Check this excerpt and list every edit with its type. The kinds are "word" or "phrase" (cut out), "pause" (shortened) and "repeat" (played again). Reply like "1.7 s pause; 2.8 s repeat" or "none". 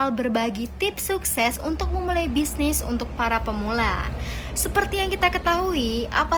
none